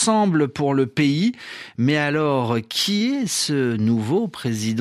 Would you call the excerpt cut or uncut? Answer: uncut